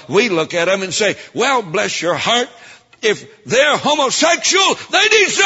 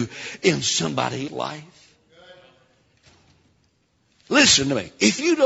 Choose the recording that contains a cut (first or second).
second